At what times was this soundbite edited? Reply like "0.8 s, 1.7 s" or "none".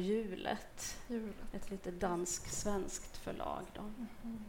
none